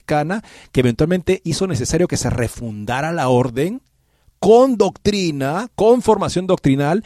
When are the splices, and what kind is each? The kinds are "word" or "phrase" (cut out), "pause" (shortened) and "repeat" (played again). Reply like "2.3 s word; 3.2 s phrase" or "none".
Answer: none